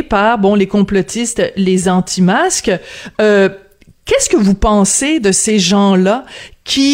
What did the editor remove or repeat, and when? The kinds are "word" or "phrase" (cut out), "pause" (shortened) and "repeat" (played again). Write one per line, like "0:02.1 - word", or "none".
none

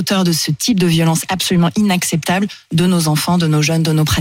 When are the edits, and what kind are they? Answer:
none

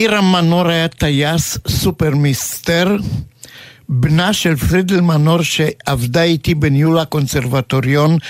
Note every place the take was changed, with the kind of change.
none

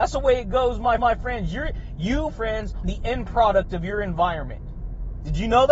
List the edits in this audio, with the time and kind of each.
0:01.0 - repeat
0:02.3 - word
0:02.8 - word

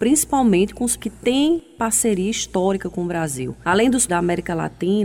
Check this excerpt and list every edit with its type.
0:01.0 - word
0:04.1 - word

